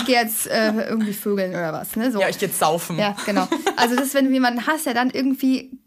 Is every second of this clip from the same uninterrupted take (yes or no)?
yes